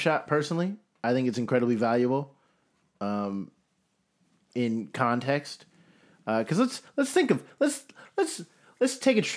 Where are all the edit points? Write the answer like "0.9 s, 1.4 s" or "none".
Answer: none

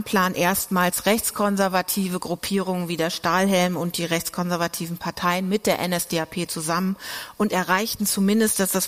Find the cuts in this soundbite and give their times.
none

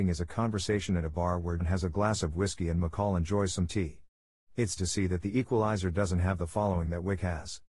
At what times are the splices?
1.6 s, 4.8 s

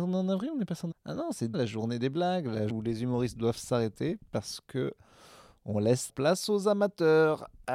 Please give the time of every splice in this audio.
0.9 s, 1.5 s, 2.7 s, 6.1 s

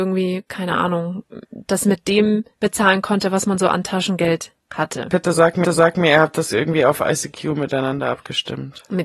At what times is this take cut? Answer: 1.5 s, 2.5 s, 4.6 s, 5.6 s

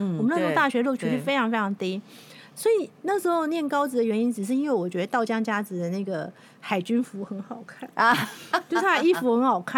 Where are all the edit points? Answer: none

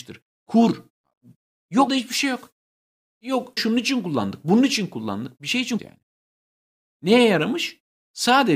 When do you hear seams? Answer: 1.9 s, 3.6 s, 5.8 s

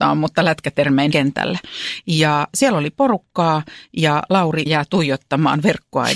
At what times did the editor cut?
1.1 s, 4.7 s

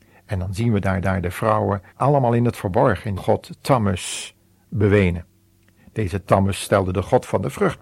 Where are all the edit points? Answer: 1.0 s, 1.9 s, 3.2 s

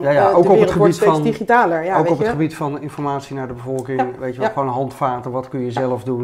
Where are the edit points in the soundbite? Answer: none

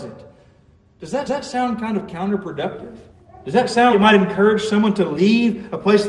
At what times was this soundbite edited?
1.3 s, 3.1 s, 3.9 s

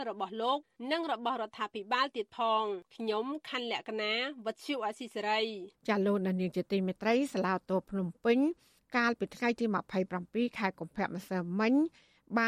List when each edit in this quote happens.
2.9 s, 5.7 s

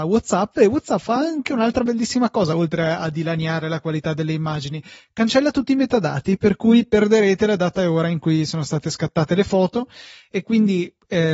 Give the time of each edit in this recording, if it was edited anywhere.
none

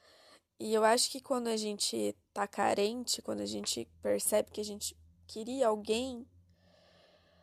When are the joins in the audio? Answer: none

